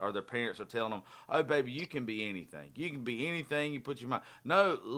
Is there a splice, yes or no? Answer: no